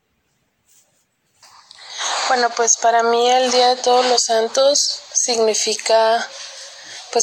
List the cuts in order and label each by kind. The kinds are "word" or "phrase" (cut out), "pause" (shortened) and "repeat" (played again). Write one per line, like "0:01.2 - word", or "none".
0:05.1 - word

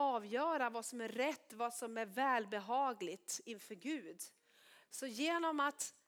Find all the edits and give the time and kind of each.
none

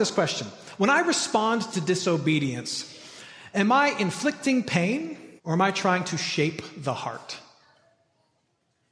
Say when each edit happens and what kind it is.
0:05.4 - pause

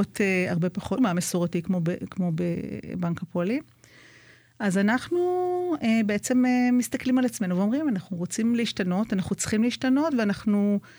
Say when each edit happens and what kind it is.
0:01.0 - word

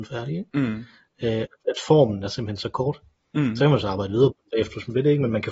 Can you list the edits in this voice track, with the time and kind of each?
none

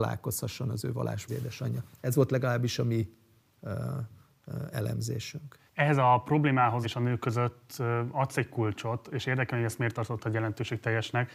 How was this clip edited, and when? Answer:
0:01.3 - phrase
0:05.7 - pause
0:06.8 - phrase

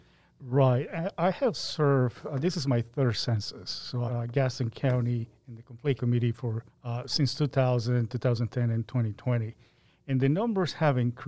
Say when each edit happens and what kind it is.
0:04.1 - phrase
0:06.0 - word
0:06.7 - pause

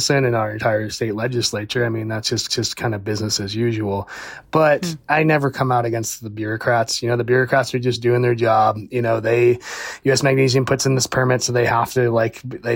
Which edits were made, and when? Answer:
0:02.5 - repeat

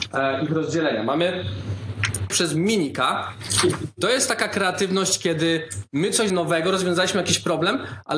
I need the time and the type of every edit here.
0:02.3 - word
0:06.3 - word

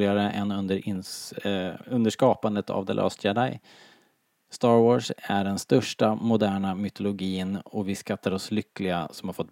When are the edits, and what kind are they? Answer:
none

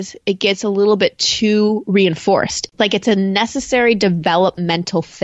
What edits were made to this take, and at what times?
0:02.7 - pause

